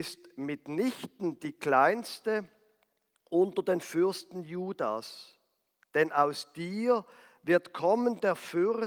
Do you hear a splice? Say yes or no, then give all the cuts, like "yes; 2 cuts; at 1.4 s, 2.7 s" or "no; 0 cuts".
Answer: no; 0 cuts